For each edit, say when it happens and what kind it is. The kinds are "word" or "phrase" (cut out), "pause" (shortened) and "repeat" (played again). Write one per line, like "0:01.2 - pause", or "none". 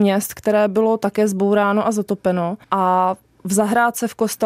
0:02.6 - pause